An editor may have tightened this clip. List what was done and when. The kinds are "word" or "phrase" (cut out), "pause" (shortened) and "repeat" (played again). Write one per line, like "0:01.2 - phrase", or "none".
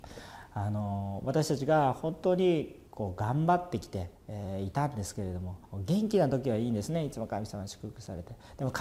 0:02.9 - pause
0:04.1 - pause
0:05.6 - pause